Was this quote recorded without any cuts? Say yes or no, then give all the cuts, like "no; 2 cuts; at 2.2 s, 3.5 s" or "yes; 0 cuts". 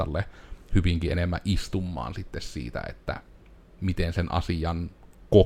yes; 0 cuts